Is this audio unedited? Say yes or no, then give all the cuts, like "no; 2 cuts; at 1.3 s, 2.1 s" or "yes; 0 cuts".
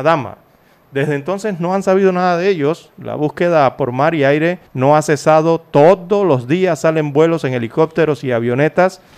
no; 1 cut; at 4.7 s